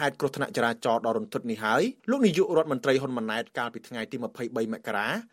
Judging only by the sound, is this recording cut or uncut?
cut